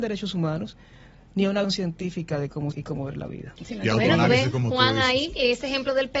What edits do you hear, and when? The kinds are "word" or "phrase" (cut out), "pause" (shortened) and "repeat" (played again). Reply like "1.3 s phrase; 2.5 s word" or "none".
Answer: 1.6 s word; 2.7 s word

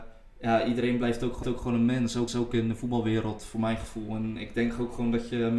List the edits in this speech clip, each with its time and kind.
1.4 s repeat; 2.3 s repeat

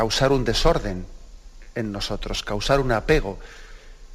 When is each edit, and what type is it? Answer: none

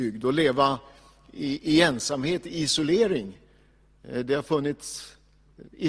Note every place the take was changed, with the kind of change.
none

